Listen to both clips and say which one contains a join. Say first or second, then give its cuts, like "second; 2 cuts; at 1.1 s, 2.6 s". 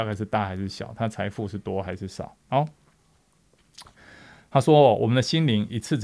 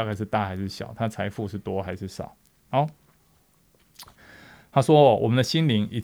first; 1 cut; at 2.4 s